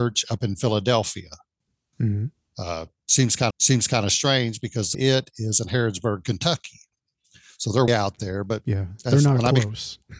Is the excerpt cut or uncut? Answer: cut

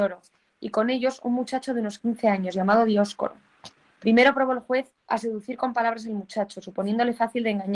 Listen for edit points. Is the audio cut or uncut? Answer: cut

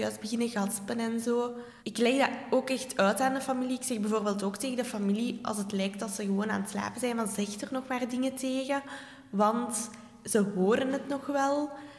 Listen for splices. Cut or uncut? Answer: cut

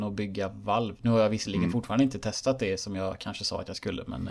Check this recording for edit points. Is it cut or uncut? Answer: uncut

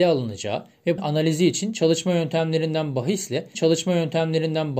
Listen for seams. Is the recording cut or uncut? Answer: cut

